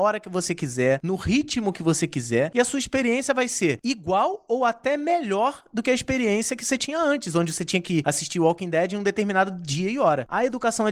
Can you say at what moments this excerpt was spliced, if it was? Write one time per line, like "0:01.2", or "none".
none